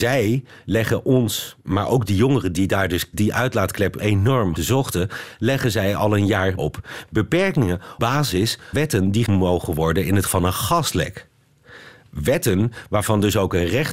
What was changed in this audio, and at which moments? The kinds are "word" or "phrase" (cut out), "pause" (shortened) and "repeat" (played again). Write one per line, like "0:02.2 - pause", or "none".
0:02.1 - word
0:03.1 - word
0:04.0 - word
0:04.6 - word
0:06.6 - word
0:08.0 - word
0:08.7 - word
0:09.2 - word
0:10.3 - word